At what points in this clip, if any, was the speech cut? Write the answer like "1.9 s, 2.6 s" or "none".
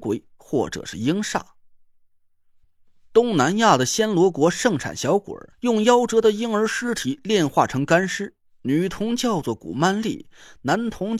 5.5 s